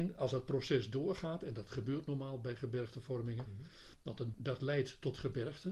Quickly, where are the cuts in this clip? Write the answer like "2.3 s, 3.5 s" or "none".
3.5 s, 4.3 s